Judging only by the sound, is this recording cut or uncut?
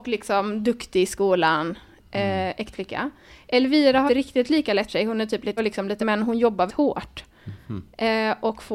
cut